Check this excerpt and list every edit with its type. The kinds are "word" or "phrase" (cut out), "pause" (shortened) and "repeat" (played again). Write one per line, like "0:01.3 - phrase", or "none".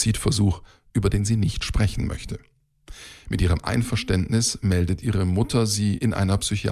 none

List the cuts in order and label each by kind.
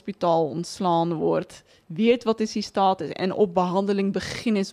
none

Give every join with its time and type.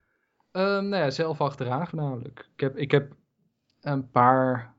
0:01.9 - word

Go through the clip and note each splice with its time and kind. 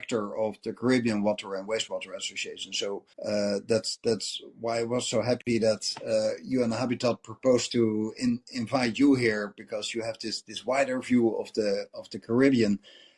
0:03.1 - pause

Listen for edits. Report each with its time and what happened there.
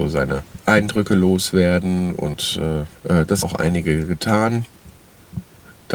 0:03.0 - phrase
0:03.4 - word

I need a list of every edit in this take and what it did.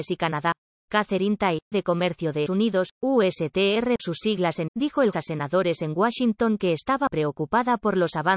0:01.7 - word
0:02.5 - word
0:04.0 - word
0:04.7 - word
0:05.1 - word
0:07.1 - word

